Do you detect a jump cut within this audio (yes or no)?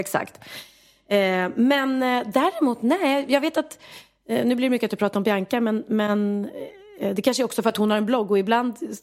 no